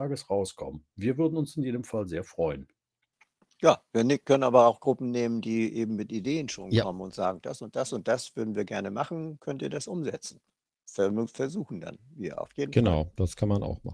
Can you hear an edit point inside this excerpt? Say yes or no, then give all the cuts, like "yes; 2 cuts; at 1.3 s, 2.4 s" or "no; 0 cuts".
no; 0 cuts